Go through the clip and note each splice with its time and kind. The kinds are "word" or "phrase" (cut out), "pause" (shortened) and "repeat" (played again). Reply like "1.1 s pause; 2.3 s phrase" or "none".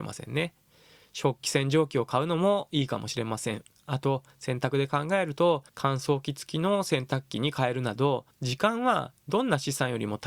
5.7 s pause; 8.3 s pause